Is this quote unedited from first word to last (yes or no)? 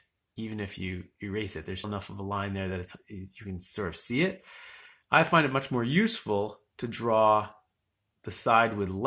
no